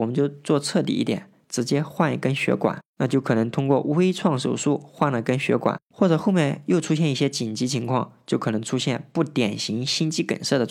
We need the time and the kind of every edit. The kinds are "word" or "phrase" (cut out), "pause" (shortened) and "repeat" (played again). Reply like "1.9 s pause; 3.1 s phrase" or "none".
none